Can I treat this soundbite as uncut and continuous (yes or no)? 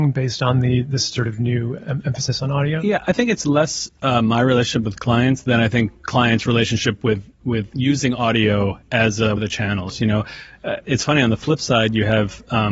no